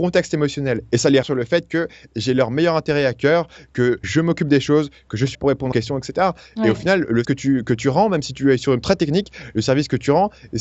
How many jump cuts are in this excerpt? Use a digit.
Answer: 6